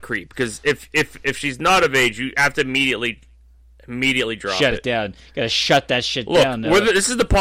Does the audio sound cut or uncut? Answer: uncut